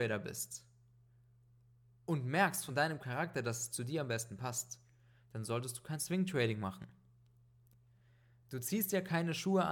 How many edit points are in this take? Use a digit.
0